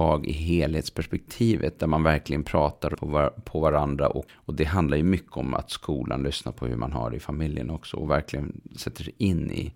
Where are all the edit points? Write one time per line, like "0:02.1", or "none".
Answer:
0:02.9
0:04.3